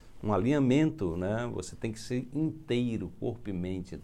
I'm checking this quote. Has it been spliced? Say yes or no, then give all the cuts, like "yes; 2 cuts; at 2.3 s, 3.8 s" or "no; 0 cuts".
no; 0 cuts